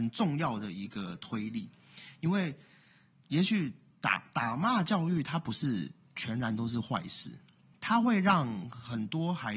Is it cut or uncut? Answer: uncut